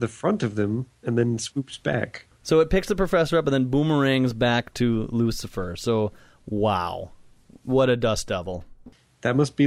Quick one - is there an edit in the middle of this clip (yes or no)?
no